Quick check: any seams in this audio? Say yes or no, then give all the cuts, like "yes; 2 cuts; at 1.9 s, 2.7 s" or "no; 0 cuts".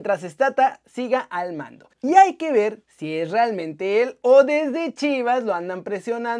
yes; 2 cuts; at 1.9 s, 2.8 s